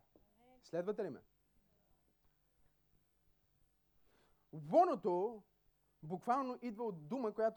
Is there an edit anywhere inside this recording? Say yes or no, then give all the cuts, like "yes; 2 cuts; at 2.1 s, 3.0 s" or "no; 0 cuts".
no; 0 cuts